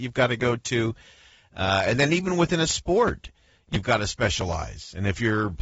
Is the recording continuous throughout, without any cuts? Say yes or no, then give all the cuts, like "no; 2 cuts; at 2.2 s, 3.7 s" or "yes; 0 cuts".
yes; 0 cuts